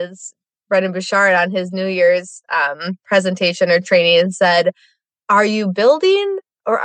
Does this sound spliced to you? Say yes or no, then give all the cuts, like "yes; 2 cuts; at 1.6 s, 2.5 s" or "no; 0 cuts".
no; 0 cuts